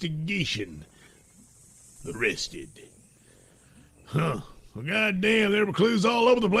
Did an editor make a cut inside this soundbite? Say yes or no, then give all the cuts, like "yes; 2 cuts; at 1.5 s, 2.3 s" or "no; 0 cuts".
yes; 1 cut; at 2.1 s